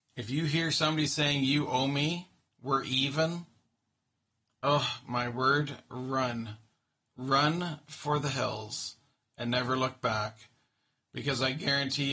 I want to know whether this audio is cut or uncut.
uncut